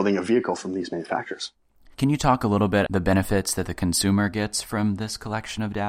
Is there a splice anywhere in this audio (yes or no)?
yes